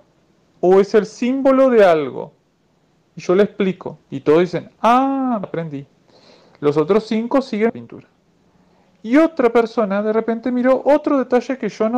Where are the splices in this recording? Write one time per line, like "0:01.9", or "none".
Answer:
0:04.0
0:05.4
0:07.7